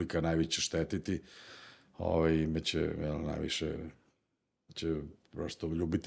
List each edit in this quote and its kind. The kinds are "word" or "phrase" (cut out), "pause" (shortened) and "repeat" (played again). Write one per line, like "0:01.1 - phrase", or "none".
none